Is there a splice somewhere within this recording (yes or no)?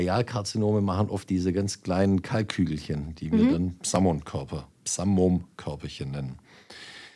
no